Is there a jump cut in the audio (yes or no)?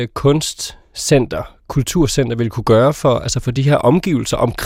no